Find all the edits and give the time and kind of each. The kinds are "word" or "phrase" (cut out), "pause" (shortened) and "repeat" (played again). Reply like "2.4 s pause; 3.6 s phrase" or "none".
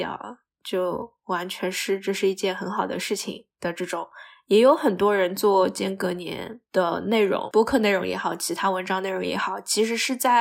3.5 s pause